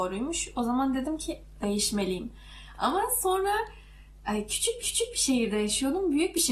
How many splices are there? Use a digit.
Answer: 2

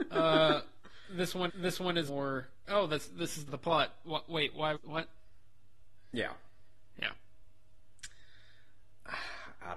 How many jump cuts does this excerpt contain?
5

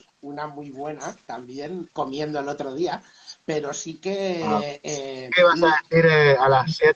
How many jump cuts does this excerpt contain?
2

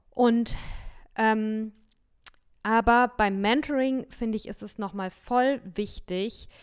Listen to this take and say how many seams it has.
0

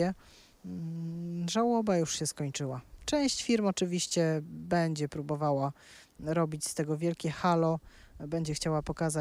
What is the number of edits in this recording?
0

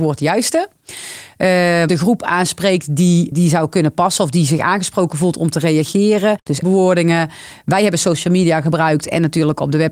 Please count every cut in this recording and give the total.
3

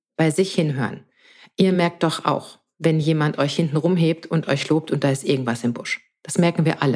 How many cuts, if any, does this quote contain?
0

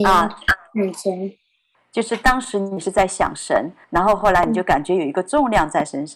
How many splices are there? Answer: 2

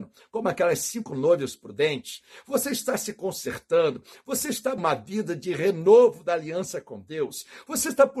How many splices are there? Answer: 1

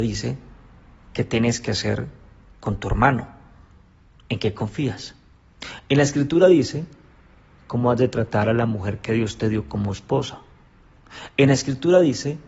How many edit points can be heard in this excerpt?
0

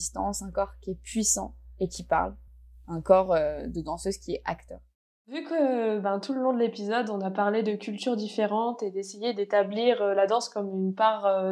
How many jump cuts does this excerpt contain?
0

